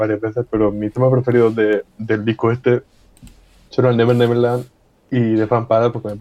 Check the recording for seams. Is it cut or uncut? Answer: uncut